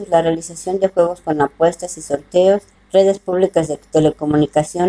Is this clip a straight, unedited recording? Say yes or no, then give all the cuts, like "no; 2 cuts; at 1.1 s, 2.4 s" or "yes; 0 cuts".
yes; 0 cuts